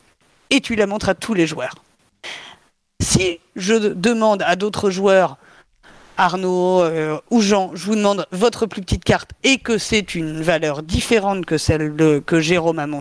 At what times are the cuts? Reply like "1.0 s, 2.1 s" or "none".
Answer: none